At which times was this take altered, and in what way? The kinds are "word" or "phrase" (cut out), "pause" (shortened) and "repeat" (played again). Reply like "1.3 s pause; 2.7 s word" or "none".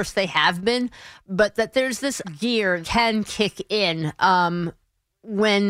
2.2 s word; 2.8 s word

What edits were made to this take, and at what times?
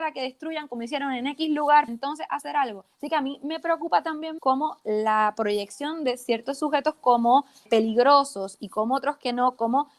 1.9 s word; 2.9 s pause; 4.4 s word; 7.7 s word

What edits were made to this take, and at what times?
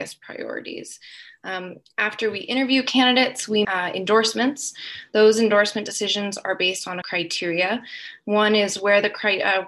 3.6 s word; 7.0 s phrase

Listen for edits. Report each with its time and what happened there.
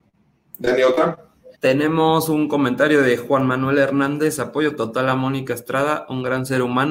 1.5 s pause

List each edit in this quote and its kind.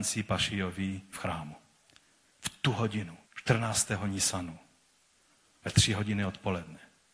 1.1 s word; 3.3 s pause

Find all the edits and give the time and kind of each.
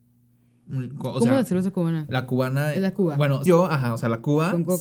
3.5 s word

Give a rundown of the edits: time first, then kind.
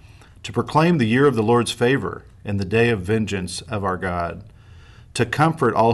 none

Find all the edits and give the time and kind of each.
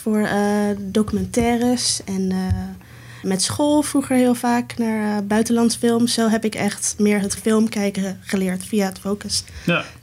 3.2 s word; 7.4 s word

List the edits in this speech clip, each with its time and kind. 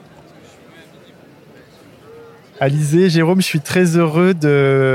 none

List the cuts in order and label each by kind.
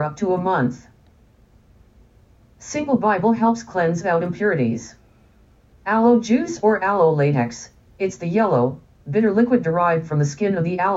none

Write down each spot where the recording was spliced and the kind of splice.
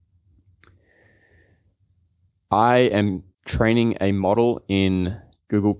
3.3 s pause

